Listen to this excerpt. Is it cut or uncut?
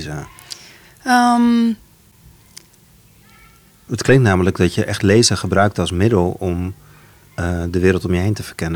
uncut